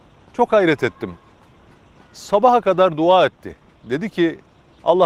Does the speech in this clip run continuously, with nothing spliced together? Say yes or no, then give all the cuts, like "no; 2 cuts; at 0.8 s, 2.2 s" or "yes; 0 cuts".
yes; 0 cuts